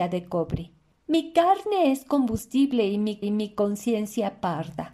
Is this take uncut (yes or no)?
no